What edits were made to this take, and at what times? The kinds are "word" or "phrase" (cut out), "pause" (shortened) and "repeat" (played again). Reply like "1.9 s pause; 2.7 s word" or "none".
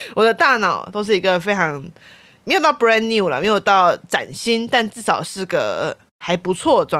none